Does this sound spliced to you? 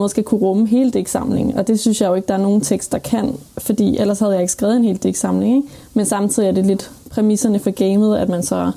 no; 0 cuts

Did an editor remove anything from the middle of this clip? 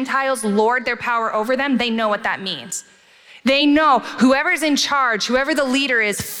no; 0 cuts

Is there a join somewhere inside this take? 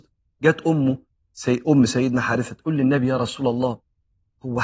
no; 0 cuts

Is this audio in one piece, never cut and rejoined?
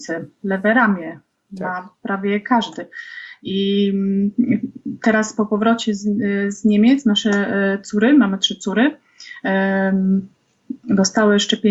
yes; 0 cuts

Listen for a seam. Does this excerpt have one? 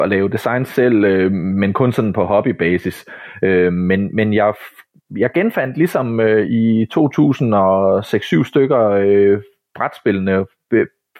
no; 0 cuts

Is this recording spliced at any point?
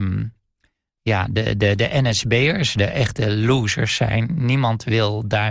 no; 0 cuts

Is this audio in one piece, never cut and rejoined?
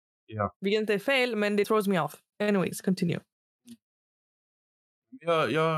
no; 1 cut; at 1.6 s

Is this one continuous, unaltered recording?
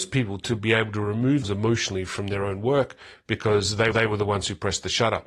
no; 2 cuts; at 1.4 s, 3.9 s

